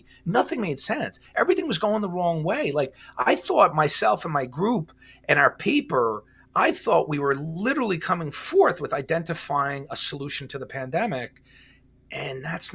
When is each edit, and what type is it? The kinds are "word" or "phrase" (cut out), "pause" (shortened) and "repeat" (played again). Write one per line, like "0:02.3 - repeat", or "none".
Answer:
none